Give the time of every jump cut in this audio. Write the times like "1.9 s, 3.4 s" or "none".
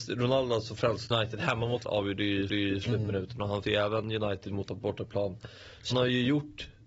1.1 s, 1.8 s, 2.5 s, 3.6 s, 4.7 s, 5.9 s